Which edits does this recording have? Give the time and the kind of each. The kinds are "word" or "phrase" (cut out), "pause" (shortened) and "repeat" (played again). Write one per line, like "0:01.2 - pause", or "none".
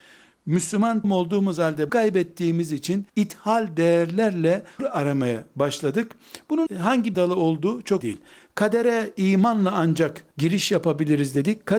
0:01.0 - word
0:01.9 - word
0:03.1 - pause
0:04.8 - word
0:06.7 - word
0:07.1 - word
0:08.0 - word
0:10.3 - pause